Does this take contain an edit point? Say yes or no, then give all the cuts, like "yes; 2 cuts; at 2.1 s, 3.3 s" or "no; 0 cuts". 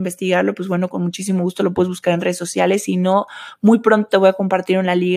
no; 0 cuts